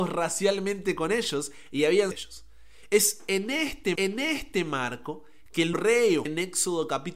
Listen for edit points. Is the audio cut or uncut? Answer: cut